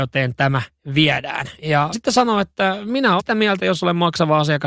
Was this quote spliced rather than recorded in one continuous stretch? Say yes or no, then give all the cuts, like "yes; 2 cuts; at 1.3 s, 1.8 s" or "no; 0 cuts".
yes; 3 cuts; at 1.9 s, 3.2 s, 3.6 s